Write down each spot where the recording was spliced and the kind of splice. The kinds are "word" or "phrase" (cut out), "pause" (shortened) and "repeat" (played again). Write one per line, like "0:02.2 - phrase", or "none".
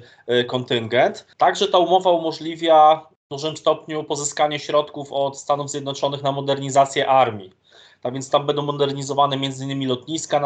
0:01.3 - pause
0:03.2 - pause